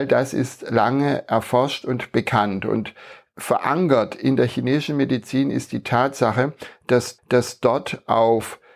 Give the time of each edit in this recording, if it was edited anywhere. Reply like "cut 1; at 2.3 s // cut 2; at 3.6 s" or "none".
cut 1; at 7.2 s